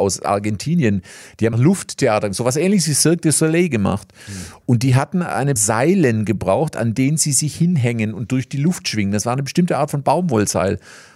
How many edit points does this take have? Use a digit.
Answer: 2